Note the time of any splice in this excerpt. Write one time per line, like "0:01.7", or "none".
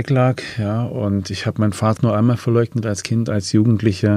0:02.0